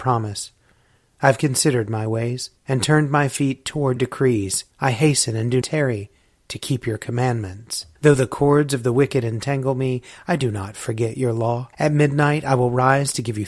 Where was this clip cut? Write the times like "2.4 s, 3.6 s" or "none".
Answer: 2.6 s, 4.0 s, 4.7 s, 5.6 s, 8.0 s, 11.7 s